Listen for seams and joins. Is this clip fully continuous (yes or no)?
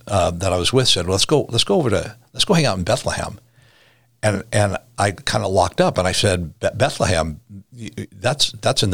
yes